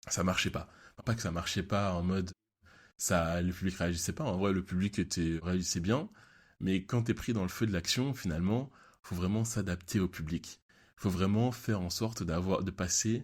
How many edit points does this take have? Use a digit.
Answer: 0